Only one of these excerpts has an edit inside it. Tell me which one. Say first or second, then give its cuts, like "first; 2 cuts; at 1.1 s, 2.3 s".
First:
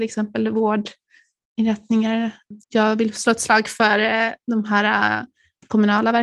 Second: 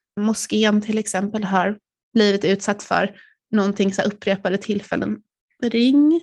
first; 1 cut; at 2.6 s